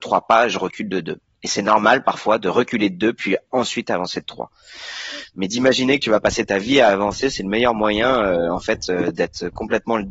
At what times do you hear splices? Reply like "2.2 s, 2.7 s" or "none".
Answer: none